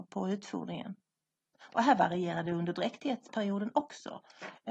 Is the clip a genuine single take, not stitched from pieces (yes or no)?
yes